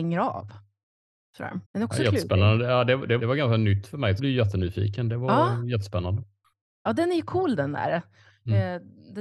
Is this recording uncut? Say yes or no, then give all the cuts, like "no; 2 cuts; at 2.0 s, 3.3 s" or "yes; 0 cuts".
no; 3 cuts; at 1.6 s, 3.2 s, 4.2 s